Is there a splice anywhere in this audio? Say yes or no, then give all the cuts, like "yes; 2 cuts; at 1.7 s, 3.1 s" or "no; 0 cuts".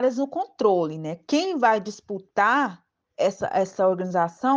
no; 0 cuts